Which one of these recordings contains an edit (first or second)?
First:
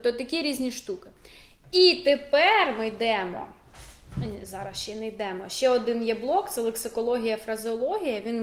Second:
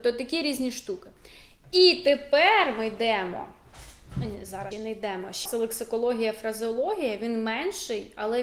second